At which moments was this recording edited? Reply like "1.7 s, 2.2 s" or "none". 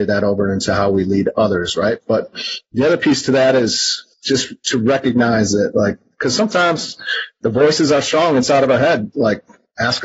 4.1 s